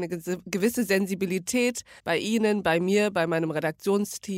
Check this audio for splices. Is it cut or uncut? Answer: cut